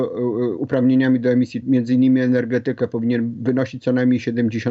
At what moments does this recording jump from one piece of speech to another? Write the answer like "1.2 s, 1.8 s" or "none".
1.6 s